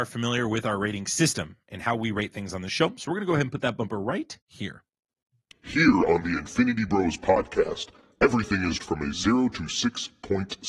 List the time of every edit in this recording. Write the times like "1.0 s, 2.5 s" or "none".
4.4 s, 8.8 s